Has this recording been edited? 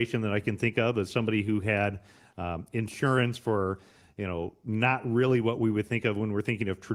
no; 0 cuts

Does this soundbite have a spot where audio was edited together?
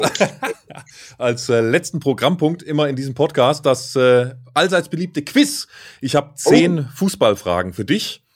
no; 0 cuts

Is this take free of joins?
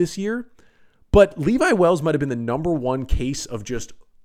yes; 0 cuts

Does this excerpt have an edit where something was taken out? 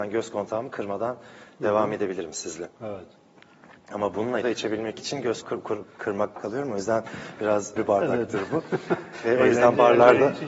yes; 5 cuts; at 2.8 s, 4.4 s, 5.4 s, 6.3 s, 7.8 s

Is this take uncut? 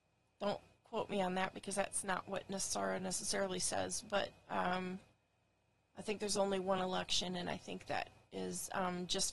yes; 0 cuts

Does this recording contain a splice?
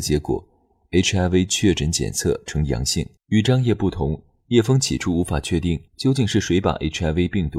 yes; 2 cuts; at 3.2 s, 5.9 s

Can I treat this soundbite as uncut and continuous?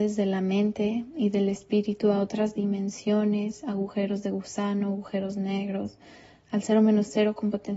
yes; 0 cuts

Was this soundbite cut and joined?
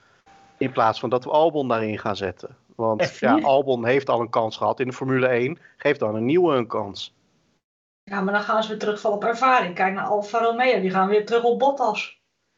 no; 0 cuts

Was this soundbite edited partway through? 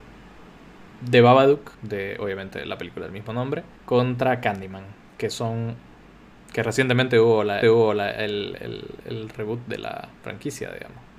yes; 3 cuts; at 1.7 s, 3.8 s, 7.6 s

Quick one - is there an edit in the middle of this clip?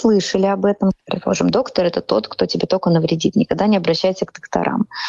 no; 0 cuts

